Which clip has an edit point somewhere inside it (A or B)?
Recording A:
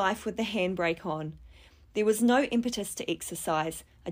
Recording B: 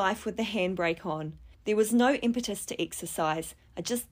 B